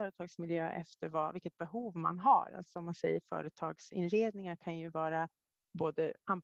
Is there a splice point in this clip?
no; 0 cuts

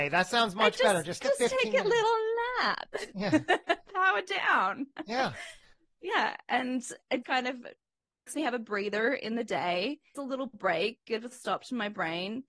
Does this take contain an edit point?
yes; 6 cuts; at 1.2 s, 3.9 s, 7.2 s, 8.3 s, 10.1 s, 11.3 s

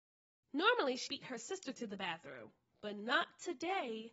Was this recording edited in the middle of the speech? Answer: yes; 1 cut; at 1.1 s

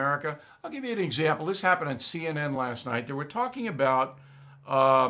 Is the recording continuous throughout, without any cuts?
yes; 0 cuts

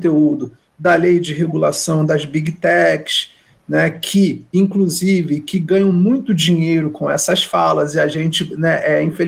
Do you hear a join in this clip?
no; 0 cuts

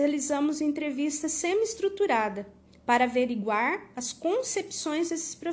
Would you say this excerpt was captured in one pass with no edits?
yes; 0 cuts

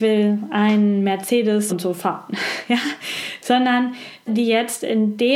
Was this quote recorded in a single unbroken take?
no; 2 cuts; at 1.7 s, 4.3 s

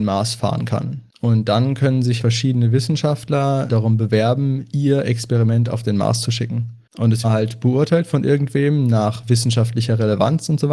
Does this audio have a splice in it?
yes; 5 cuts; at 1.1 s, 2.2 s, 3.7 s, 6.9 s, 7.2 s

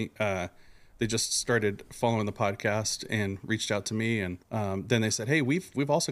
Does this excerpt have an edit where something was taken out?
yes; 1 cut; at 4.4 s

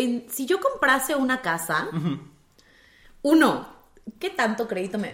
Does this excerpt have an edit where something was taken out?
no; 0 cuts

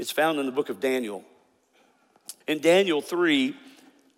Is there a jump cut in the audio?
yes; 1 cut; at 2.4 s

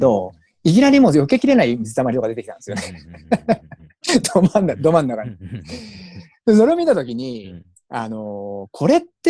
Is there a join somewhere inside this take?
no; 0 cuts

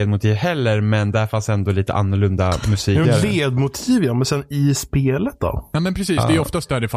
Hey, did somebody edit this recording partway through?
yes; 1 cut; at 3.0 s

